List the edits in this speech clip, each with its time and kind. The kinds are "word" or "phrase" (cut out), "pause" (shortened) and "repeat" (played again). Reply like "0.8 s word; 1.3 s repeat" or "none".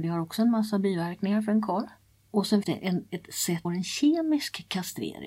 2.0 s pause; 2.6 s word; 3.6 s phrase